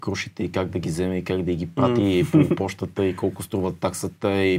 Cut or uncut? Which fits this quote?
uncut